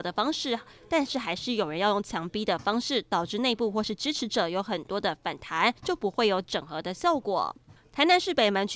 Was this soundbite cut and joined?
yes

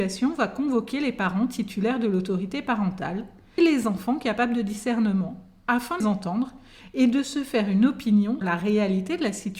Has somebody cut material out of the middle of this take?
yes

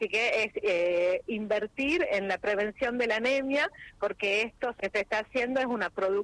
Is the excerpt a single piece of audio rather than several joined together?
no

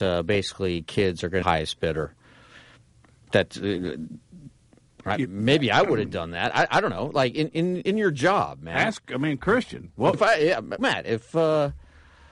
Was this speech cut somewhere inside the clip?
yes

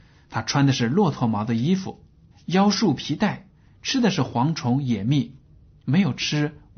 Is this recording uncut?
no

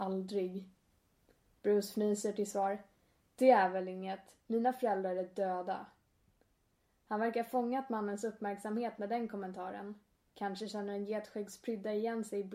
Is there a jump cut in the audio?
no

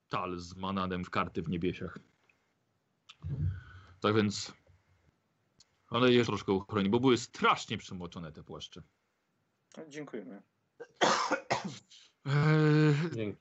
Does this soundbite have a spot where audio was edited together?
yes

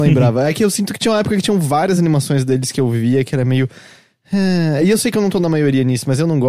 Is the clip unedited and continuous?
yes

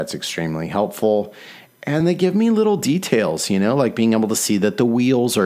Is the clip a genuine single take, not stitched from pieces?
no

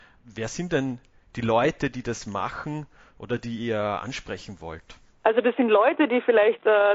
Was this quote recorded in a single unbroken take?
yes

